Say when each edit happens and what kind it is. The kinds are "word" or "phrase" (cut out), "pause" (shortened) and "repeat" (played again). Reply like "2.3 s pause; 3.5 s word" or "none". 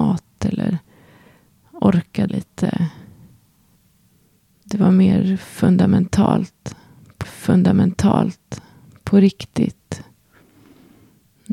2.3 s word; 7.2 s repeat